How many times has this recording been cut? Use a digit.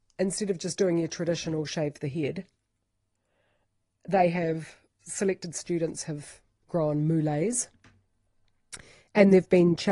0